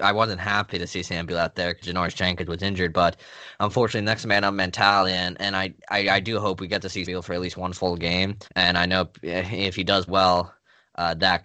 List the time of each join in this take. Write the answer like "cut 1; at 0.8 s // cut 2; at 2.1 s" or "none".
cut 1; at 1.8 s // cut 2; at 5.8 s // cut 3; at 7.1 s // cut 4; at 8.5 s // cut 5; at 10.1 s